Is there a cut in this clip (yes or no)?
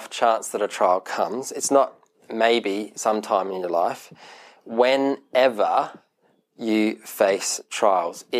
no